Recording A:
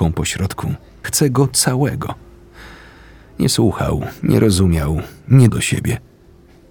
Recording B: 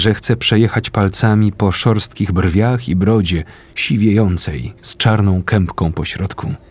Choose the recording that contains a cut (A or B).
A